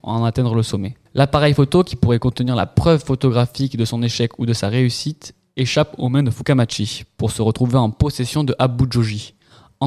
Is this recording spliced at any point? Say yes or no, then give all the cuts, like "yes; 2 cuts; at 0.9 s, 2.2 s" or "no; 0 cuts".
yes; 1 cut; at 1.1 s